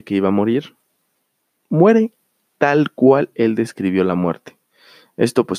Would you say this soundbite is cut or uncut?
uncut